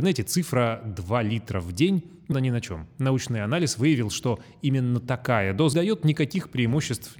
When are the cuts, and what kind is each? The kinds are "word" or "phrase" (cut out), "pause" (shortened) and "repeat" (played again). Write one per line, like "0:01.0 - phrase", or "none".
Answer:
0:02.3 - word
0:05.7 - word

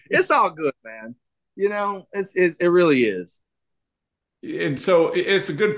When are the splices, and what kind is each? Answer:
none

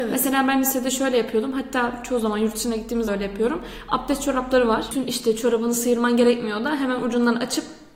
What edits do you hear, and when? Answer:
0:03.1 - word

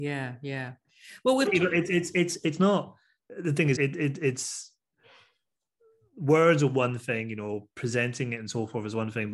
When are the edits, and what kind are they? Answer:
0:01.5 - word
0:03.8 - word

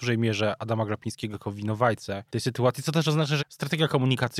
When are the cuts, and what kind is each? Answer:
0:02.3 - pause
0:03.4 - word

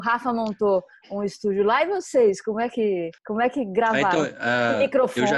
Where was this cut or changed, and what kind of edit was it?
0:03.2 - pause

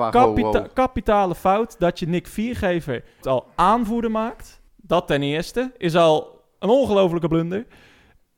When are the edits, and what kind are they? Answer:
0:03.2 - word
0:04.7 - pause

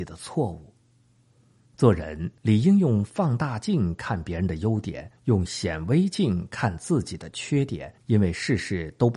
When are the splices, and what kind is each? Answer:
0:02.4 - pause
0:05.2 - pause
0:08.0 - pause

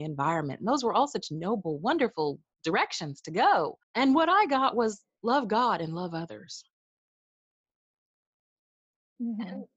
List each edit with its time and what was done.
0:03.8 - pause

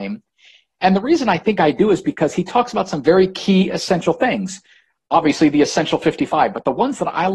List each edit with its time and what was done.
none

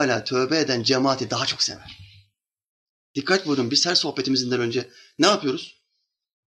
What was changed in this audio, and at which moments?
none

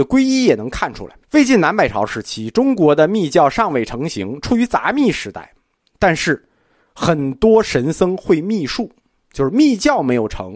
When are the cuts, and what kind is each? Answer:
0:01.2 - pause

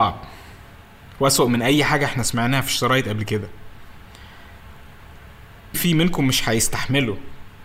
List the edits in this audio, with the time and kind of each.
0:05.7 - word

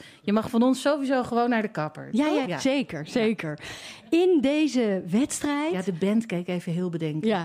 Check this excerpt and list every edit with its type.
0:02.4 - word

